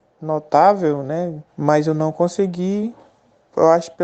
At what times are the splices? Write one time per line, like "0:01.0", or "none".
0:01.5